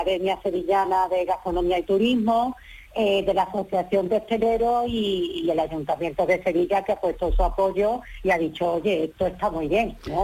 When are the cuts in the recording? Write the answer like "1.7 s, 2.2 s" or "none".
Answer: none